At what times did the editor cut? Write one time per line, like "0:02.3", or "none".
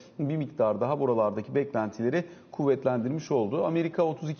none